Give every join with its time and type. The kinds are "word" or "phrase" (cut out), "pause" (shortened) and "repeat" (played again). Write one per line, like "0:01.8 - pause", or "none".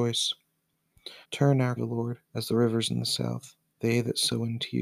0:01.2 - pause
0:01.8 - word
0:02.2 - pause
0:03.7 - pause

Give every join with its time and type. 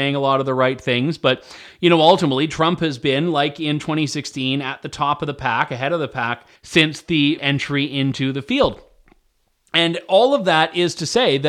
0:06.6 - pause
0:07.4 - word

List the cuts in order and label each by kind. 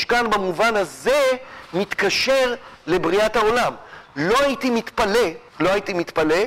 0:05.5 - pause

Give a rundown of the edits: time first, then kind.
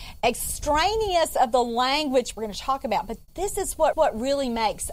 0:02.4 - phrase
0:03.9 - repeat

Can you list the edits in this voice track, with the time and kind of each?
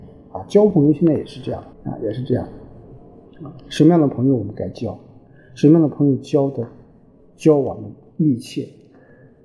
0:01.7 - pause

